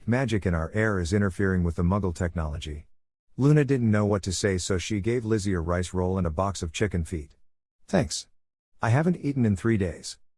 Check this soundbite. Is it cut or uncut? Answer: uncut